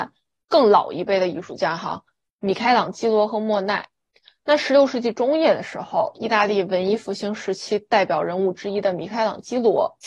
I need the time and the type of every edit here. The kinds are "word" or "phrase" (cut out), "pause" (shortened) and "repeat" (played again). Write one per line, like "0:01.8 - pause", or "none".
none